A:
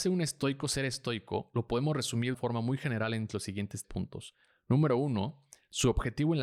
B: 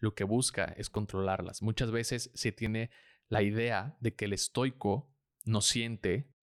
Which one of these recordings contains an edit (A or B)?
A